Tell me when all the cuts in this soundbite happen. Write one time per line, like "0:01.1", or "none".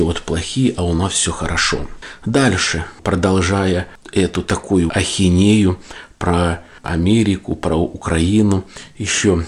0:04.9